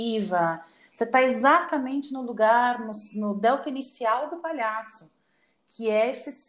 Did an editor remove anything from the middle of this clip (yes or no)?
no